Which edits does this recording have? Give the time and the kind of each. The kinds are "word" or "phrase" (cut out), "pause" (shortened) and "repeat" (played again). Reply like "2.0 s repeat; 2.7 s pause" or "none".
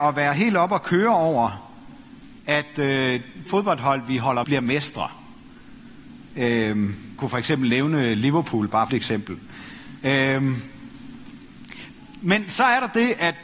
3.5 s word; 4.4 s word; 7.2 s word; 8.9 s phrase